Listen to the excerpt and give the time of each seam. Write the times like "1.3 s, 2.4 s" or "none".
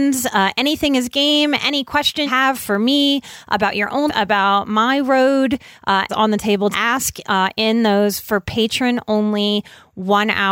2.3 s, 4.1 s, 6.1 s, 6.7 s